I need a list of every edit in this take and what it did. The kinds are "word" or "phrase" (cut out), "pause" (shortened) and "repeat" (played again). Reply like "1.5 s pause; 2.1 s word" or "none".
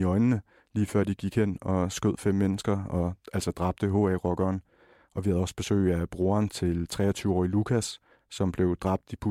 none